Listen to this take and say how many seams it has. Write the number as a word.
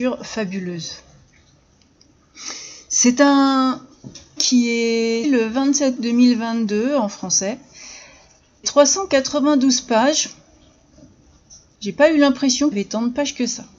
five